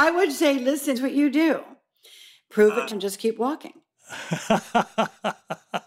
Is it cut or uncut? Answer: cut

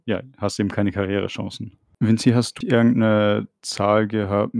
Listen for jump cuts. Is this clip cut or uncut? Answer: cut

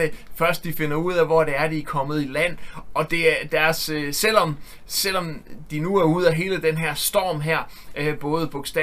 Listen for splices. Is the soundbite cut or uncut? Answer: uncut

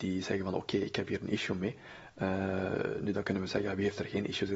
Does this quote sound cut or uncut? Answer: uncut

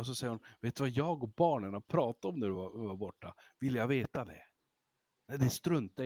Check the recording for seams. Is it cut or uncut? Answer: uncut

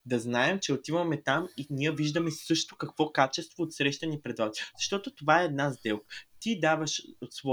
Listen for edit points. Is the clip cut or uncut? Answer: uncut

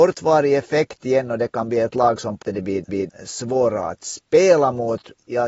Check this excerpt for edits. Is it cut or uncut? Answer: cut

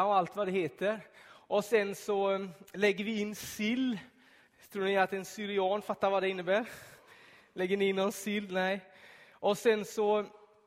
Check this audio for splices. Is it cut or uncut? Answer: uncut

